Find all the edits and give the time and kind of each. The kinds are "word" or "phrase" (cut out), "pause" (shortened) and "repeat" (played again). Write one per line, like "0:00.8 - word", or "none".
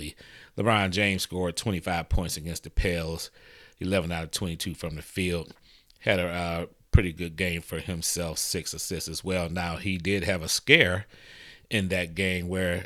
none